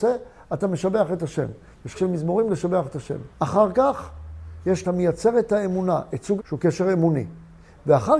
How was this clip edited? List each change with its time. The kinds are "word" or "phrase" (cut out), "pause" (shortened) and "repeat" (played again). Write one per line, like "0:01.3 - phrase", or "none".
0:01.9 - word
0:03.3 - pause
0:04.8 - phrase
0:06.4 - word